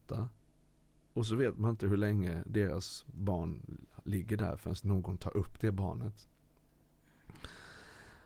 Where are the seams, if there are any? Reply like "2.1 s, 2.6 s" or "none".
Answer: none